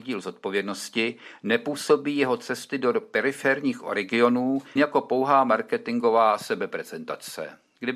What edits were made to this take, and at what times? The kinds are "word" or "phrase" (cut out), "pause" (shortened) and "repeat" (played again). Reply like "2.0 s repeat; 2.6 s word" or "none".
4.8 s word